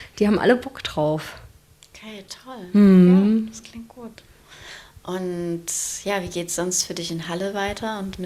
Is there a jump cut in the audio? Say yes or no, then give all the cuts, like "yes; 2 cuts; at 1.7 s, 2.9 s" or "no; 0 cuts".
no; 0 cuts